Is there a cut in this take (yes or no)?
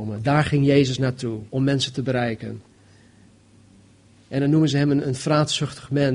yes